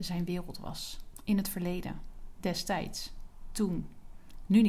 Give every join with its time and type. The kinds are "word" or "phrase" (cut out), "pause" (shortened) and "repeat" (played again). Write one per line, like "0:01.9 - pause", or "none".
none